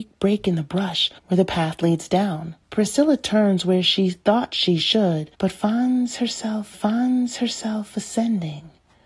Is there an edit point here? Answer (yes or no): yes